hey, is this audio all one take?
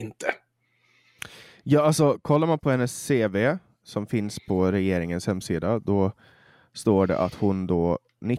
yes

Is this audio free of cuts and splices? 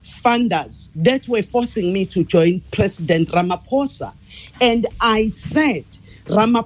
yes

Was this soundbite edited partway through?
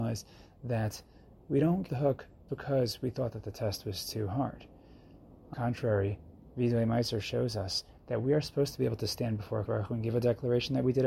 yes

